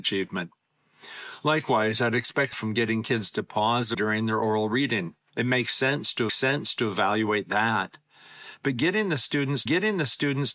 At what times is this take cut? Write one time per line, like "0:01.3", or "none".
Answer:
0:02.5
0:03.9
0:05.3
0:06.3
0:09.7